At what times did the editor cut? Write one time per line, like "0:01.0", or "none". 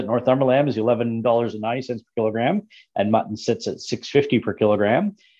none